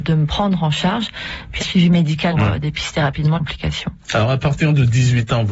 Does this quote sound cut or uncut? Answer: cut